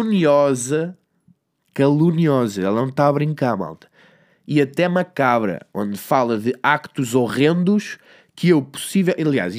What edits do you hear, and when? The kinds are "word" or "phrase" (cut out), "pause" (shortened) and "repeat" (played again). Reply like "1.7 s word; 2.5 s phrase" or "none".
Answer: none